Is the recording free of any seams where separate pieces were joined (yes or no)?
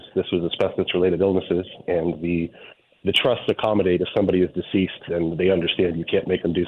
yes